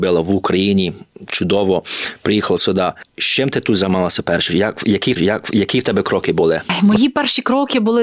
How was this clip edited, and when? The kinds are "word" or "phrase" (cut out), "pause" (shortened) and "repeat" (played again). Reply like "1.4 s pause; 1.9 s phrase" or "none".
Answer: 3.1 s pause; 5.2 s repeat